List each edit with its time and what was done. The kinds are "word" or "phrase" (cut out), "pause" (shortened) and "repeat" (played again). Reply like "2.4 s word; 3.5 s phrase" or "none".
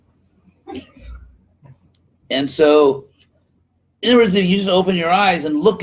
none

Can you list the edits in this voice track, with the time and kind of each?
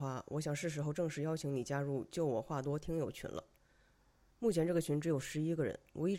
none

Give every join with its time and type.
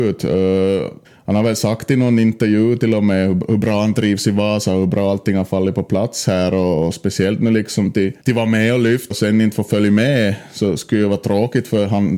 1.0 s pause; 8.2 s pause; 9.1 s word

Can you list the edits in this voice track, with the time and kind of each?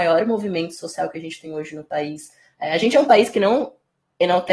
none

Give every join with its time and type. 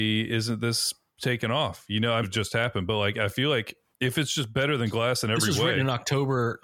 2.2 s phrase

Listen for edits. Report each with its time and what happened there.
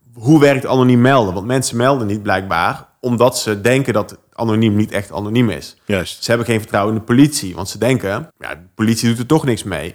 8.3 s pause

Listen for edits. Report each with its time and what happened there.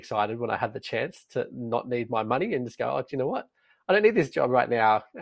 none

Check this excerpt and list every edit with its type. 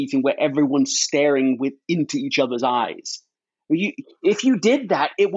none

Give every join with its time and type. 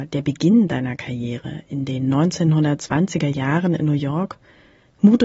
none

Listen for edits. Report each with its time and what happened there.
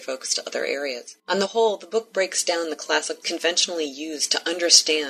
1.2 s pause; 3.2 s word

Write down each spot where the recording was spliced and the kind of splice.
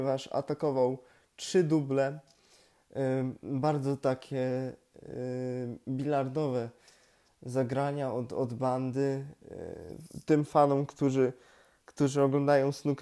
none

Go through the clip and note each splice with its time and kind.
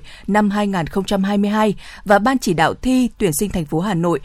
none

